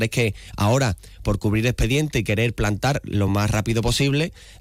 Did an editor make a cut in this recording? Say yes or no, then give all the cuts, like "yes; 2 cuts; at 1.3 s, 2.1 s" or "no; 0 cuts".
no; 0 cuts